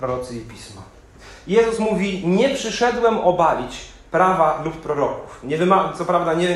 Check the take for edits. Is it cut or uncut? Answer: uncut